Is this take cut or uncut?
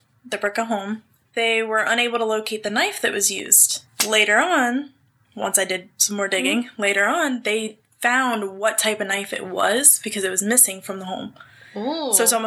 uncut